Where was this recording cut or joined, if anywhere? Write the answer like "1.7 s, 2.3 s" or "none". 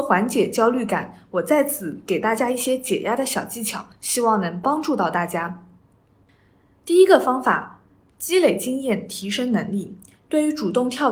none